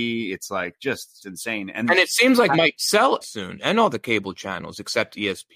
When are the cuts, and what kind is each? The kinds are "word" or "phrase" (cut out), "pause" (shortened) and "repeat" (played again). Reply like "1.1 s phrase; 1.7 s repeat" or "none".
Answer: 1.2 s word; 1.8 s word; 2.5 s word; 3.2 s word